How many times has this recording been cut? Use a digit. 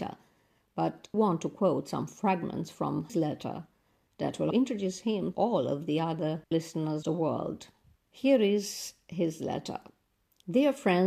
6